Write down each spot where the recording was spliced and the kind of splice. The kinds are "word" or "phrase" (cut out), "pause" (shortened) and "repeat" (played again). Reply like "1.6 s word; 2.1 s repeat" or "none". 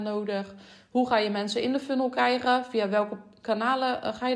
none

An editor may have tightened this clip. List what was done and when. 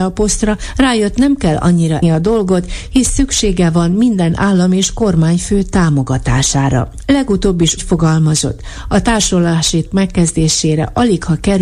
2.0 s word; 7.8 s word; 9.9 s word

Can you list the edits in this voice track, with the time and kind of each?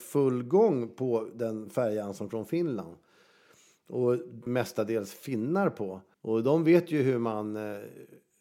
2.3 s word; 4.5 s word; 6.1 s pause

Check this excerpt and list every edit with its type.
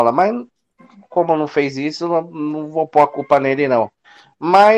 none

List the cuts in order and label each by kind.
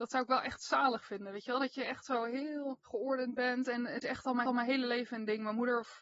4.0 s word; 4.5 s repeat

